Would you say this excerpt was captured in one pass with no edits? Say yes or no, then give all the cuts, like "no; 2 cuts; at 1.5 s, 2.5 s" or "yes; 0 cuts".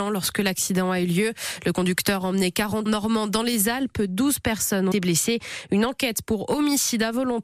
no; 2 cuts; at 2.9 s, 4.9 s